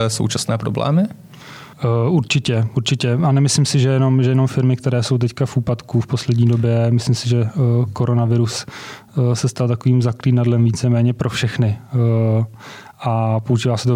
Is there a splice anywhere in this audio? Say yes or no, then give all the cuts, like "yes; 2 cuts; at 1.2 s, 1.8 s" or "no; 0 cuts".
yes; 1 cut; at 1.7 s